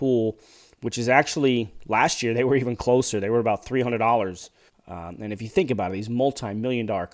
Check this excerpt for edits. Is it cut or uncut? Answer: cut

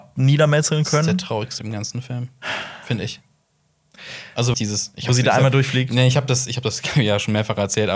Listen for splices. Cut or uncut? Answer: cut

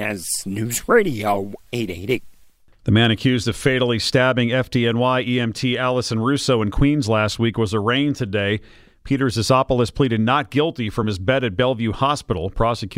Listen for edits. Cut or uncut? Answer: uncut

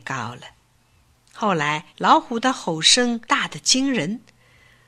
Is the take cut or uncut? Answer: cut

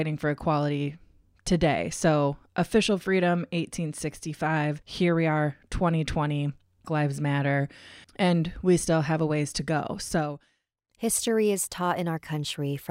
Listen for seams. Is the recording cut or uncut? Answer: cut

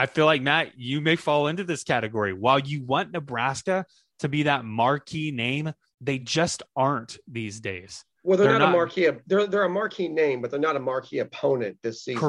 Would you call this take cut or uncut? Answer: uncut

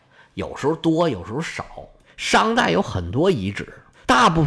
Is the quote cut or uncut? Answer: uncut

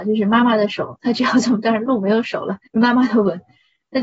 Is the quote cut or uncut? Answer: cut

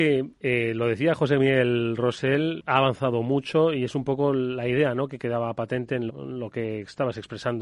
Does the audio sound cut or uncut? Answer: cut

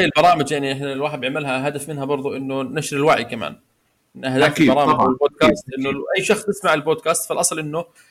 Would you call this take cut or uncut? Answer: uncut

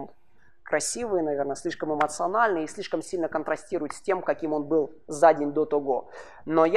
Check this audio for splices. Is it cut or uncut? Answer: uncut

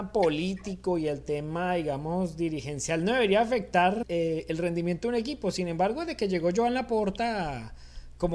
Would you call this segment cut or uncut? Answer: cut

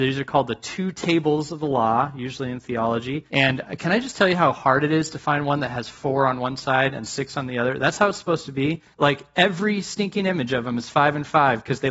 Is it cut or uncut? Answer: cut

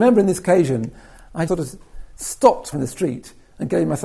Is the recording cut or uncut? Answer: cut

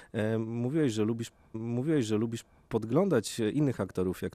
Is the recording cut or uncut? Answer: cut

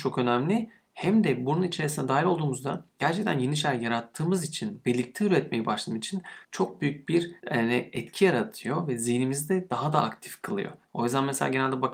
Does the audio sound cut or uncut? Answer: cut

